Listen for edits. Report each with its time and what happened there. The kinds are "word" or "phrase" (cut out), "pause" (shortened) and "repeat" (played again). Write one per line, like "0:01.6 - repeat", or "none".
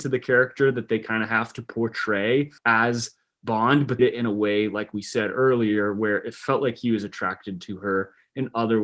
0:02.6 - pause
0:04.0 - phrase